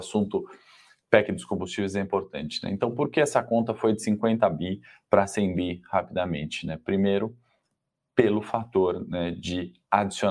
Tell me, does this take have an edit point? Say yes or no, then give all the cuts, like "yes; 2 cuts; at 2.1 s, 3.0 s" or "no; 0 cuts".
no; 0 cuts